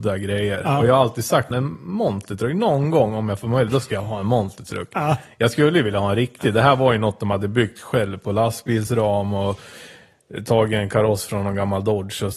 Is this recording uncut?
no; 1 cut; at 1.5 s

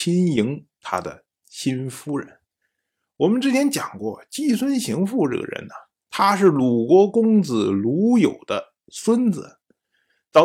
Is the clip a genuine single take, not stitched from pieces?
yes; 0 cuts

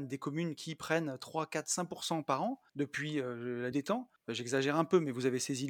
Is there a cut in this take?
yes; 3 cuts; at 2.7 s, 3.7 s, 4.2 s

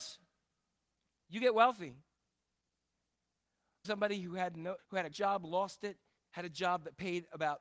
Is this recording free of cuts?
no; 4 cuts; at 3.8 s, 4.8 s, 5.1 s, 6.2 s

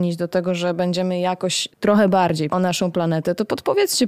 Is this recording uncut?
no; 2 cuts; at 1.7 s, 2.5 s

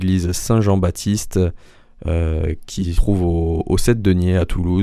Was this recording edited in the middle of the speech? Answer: yes; 1 cut; at 3.0 s

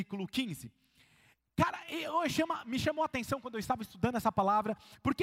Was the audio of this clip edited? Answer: no; 0 cuts

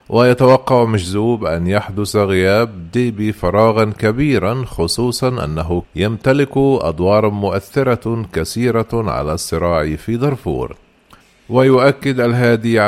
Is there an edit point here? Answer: yes; 1 cut; at 5.8 s

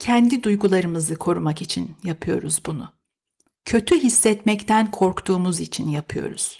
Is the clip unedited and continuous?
yes; 0 cuts

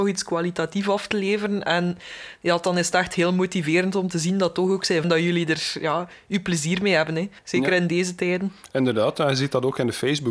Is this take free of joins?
no; 2 cuts; at 5.0 s, 7.4 s

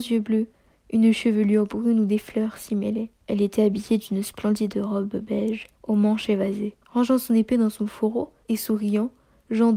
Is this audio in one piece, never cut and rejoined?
no; 4 cuts; at 3.2 s, 5.7 s, 6.8 s, 8.4 s

